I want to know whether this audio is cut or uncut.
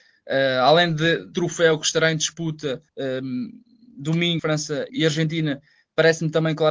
cut